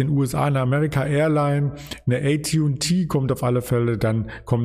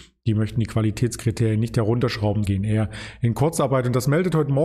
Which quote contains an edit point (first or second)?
second